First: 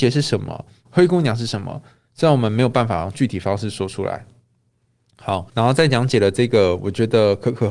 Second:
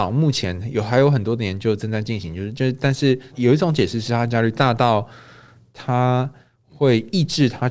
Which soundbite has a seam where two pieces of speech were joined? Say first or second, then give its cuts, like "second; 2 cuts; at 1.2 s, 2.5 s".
first; 1 cut; at 5.5 s